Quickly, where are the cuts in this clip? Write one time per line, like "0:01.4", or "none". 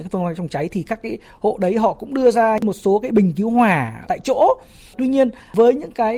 none